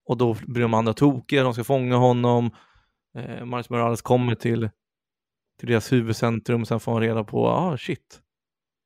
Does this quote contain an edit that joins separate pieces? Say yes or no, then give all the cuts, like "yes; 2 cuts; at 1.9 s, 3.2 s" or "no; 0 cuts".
no; 0 cuts